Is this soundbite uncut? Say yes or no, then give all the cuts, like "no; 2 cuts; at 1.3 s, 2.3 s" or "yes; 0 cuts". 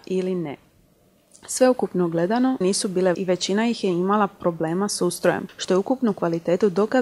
no; 2 cuts; at 2.6 s, 3.1 s